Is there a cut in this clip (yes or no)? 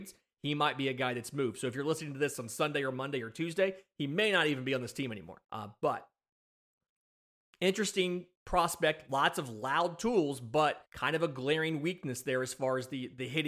yes